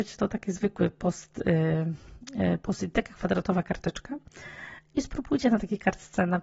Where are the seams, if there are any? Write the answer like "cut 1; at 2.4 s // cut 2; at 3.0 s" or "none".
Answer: none